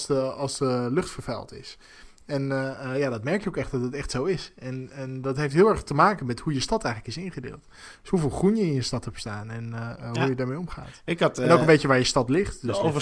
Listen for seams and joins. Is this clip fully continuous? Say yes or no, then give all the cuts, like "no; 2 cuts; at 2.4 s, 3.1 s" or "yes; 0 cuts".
yes; 0 cuts